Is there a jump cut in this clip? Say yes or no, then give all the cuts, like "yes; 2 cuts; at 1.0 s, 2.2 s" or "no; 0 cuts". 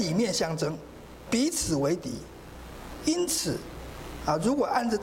yes; 1 cut; at 1.3 s